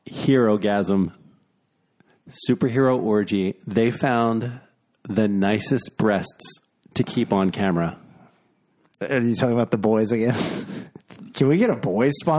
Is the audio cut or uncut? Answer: uncut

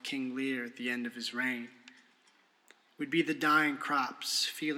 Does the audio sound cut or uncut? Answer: uncut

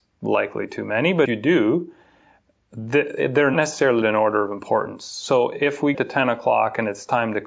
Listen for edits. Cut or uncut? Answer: cut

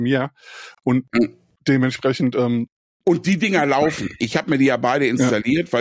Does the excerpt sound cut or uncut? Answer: uncut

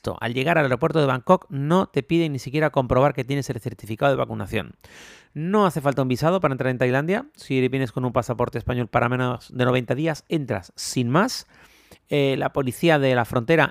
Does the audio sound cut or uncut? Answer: uncut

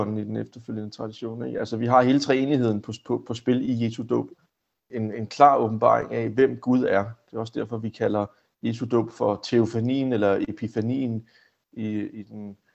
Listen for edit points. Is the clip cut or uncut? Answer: uncut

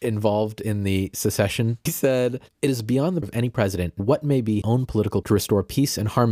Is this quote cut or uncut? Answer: cut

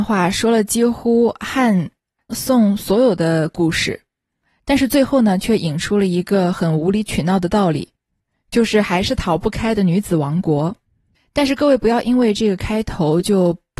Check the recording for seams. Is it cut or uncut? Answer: cut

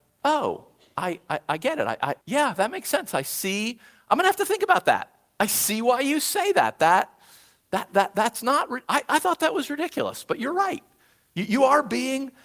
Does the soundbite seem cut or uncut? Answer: cut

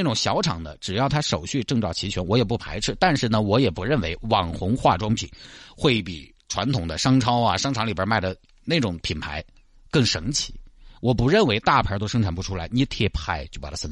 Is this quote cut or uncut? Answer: uncut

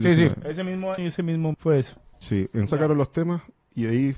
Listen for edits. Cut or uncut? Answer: cut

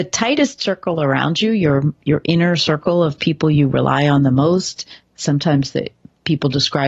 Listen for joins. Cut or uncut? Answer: uncut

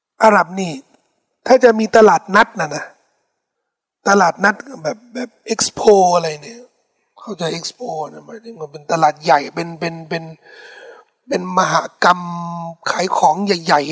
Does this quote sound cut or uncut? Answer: uncut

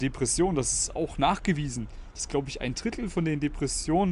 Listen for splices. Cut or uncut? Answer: uncut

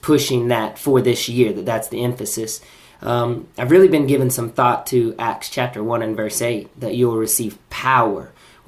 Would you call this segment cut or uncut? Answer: uncut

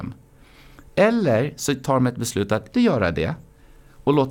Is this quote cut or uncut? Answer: cut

